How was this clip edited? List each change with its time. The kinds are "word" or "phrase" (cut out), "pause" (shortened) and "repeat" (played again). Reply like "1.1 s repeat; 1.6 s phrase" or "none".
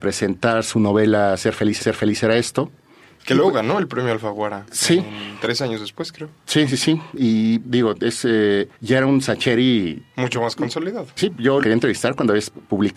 1.8 s repeat; 3.0 s pause; 7.6 s word; 8.7 s pause; 11.2 s word; 11.6 s phrase